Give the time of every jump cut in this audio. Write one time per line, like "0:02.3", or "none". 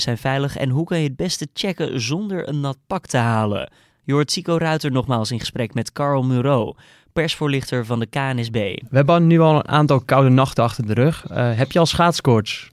none